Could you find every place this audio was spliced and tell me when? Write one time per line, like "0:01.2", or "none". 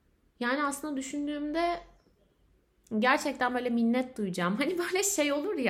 none